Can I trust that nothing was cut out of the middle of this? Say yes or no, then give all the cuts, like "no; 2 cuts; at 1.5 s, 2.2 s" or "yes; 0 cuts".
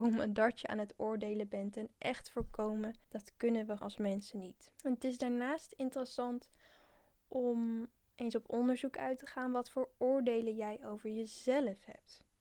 no; 3 cuts; at 3.0 s, 3.8 s, 4.7 s